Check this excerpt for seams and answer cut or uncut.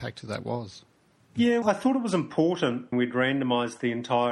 cut